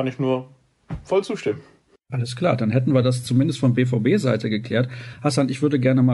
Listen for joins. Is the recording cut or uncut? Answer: uncut